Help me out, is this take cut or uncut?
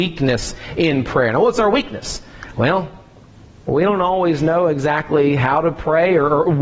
uncut